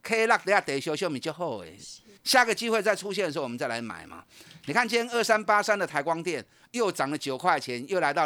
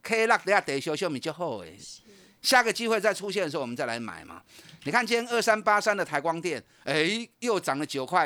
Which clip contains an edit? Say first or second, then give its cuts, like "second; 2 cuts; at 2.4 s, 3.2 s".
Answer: first; 2 cuts; at 2.2 s, 6.7 s